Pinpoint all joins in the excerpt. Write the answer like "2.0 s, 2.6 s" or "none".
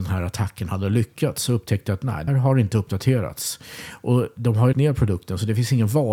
2.3 s, 4.7 s